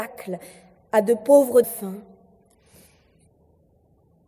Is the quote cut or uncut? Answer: cut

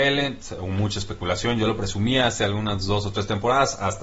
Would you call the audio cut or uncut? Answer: uncut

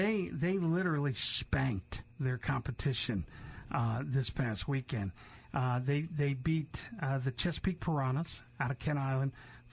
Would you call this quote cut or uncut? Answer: cut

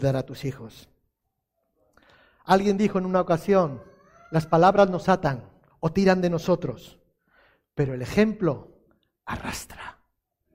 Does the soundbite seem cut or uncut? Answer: uncut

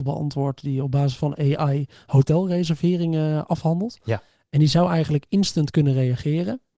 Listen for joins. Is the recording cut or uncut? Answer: uncut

